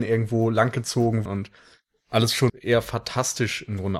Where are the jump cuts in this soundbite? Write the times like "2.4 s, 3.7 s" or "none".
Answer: 1.3 s, 2.5 s